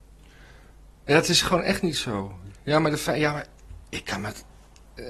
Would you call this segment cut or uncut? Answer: uncut